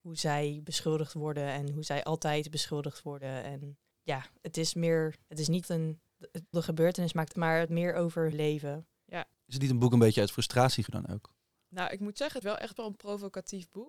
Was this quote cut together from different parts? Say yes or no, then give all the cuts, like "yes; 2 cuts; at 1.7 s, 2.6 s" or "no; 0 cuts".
yes; 8 cuts; at 5.6 s, 6.5 s, 7.3 s, 7.7 s, 8.3 s, 10.9 s, 12.4 s, 12.8 s